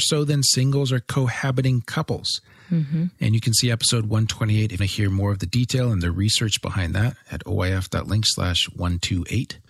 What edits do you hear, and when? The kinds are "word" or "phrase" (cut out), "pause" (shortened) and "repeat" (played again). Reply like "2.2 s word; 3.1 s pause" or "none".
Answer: 4.8 s phrase